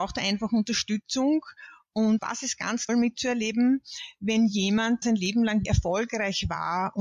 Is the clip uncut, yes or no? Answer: no